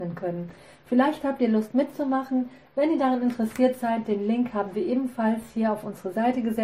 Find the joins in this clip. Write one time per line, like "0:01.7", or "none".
none